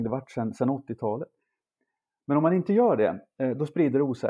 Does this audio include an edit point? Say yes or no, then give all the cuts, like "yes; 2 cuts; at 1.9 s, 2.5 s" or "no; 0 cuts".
no; 0 cuts